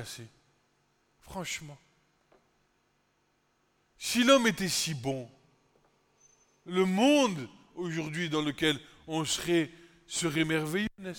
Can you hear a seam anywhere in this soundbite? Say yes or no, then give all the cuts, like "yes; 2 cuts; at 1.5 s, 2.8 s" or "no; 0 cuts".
no; 0 cuts